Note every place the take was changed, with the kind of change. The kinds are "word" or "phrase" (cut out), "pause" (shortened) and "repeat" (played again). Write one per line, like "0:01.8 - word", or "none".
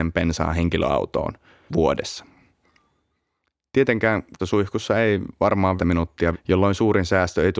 0:01.7 - word
0:04.4 - word
0:05.8 - word
0:06.3 - word